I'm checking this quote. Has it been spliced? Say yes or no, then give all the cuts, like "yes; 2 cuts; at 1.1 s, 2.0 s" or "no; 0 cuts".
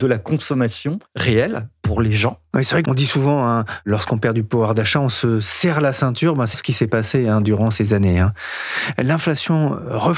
yes; 3 cuts; at 1.1 s, 2.8 s, 6.5 s